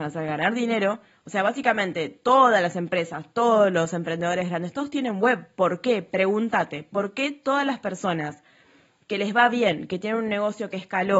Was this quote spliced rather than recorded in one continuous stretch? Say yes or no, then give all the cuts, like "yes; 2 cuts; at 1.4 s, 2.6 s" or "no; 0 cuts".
no; 0 cuts